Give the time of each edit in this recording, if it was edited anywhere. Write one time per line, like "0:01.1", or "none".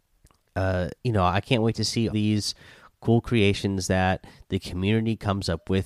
0:01.0
0:02.1

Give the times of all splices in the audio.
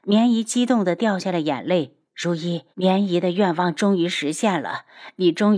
0:02.1
0:02.7

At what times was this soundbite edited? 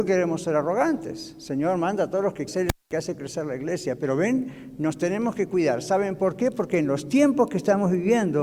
0:02.5

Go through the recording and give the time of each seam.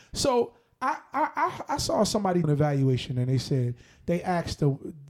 0:02.4

